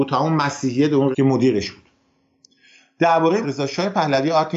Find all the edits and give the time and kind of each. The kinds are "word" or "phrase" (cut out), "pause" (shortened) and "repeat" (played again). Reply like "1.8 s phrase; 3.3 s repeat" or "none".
1.1 s word; 3.4 s word